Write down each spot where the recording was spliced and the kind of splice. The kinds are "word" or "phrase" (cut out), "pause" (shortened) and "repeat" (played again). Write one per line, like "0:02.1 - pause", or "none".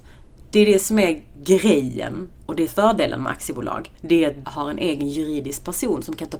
0:02.7 - phrase
0:03.9 - pause
0:04.4 - word